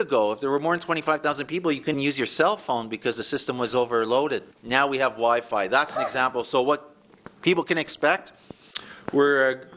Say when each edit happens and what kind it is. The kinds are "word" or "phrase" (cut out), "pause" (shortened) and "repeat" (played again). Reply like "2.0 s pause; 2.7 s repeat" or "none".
1.9 s word; 4.5 s pause